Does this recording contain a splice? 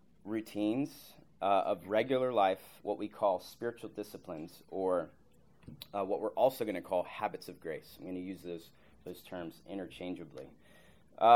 no; 0 cuts

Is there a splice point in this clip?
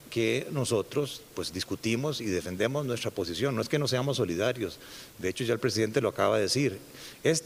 no; 0 cuts

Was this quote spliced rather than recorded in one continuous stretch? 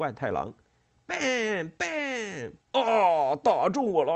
yes; 1 cut; at 2.6 s

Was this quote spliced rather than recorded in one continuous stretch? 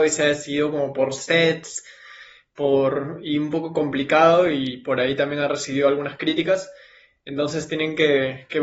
no; 0 cuts

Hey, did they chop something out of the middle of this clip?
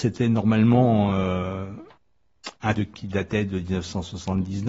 yes; 1 cut; at 2.8 s

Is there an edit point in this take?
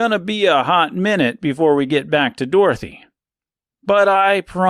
no; 0 cuts

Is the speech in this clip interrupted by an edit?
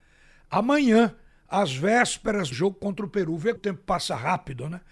yes; 2 cuts; at 2.5 s, 3.6 s

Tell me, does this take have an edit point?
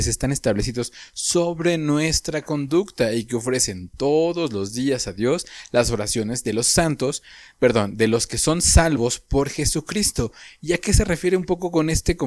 no; 0 cuts

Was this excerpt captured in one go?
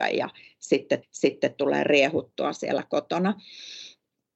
no; 1 cut; at 1.0 s

